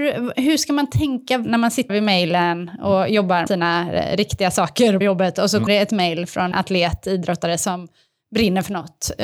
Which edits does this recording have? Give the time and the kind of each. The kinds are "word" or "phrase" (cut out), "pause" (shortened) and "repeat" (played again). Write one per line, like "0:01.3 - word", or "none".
0:01.9 - word
0:03.5 - word
0:05.0 - word
0:05.7 - word
0:06.5 - word